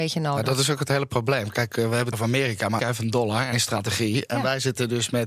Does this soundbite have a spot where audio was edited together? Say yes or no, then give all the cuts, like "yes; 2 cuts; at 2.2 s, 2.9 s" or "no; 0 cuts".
yes; 3 cuts; at 2.1 s, 2.8 s, 3.5 s